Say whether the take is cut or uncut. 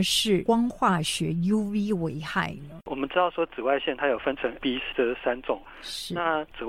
cut